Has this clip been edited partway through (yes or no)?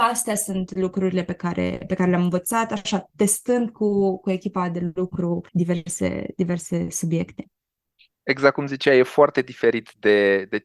yes